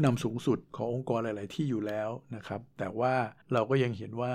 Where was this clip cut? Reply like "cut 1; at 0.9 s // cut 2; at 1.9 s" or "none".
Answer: cut 1; at 3.4 s